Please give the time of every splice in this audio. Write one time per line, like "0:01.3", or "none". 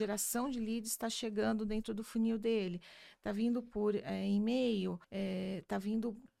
0:05.0